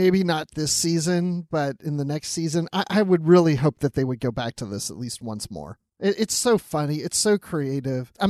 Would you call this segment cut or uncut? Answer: uncut